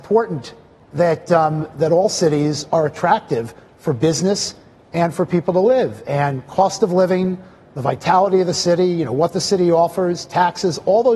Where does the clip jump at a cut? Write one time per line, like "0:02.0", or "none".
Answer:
none